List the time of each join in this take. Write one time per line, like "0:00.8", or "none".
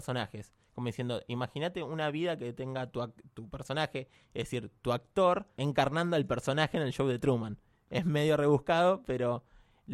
none